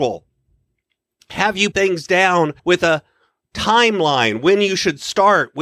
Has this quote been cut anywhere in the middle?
yes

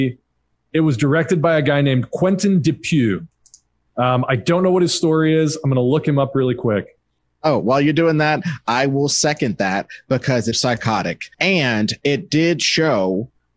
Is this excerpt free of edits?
no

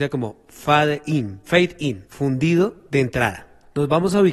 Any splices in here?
yes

